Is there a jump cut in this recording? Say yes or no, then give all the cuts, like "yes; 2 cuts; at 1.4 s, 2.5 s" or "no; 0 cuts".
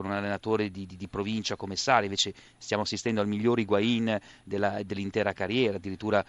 no; 0 cuts